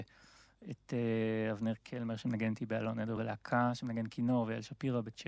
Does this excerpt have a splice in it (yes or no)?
no